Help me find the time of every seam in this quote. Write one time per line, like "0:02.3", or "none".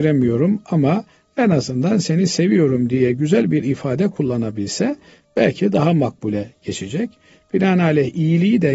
none